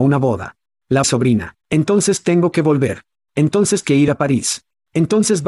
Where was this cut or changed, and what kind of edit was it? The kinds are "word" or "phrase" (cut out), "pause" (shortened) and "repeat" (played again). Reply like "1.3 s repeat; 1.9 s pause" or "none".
1.0 s phrase; 1.6 s pause; 3.8 s word